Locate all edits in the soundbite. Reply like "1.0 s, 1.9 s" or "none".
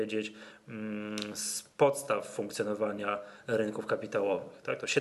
none